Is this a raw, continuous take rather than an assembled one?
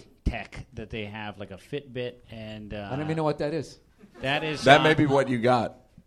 no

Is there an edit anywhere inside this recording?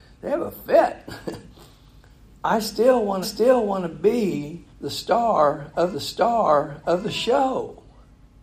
yes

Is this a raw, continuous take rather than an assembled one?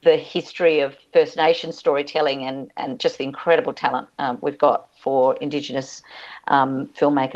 yes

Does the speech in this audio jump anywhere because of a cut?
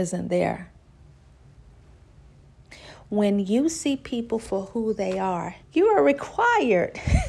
yes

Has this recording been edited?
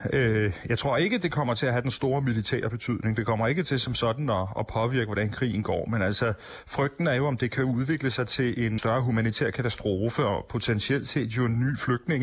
yes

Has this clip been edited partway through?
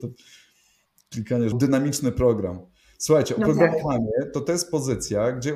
yes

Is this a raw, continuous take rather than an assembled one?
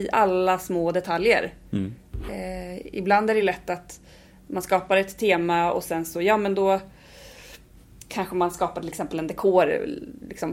yes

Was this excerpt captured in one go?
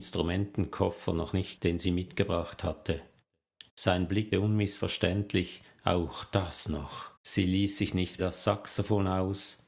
no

